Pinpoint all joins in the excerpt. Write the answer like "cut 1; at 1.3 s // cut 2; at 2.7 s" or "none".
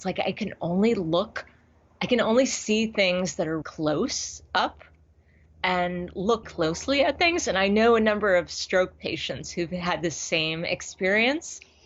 cut 1; at 3.6 s // cut 2; at 6.4 s